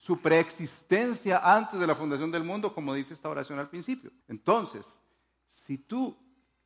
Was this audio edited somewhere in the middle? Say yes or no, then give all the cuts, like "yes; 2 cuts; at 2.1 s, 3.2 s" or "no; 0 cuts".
yes; 1 cut; at 4.2 s